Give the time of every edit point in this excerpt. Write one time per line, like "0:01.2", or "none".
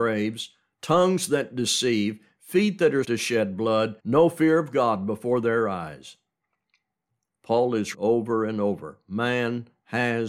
0:03.0
0:04.0
0:07.9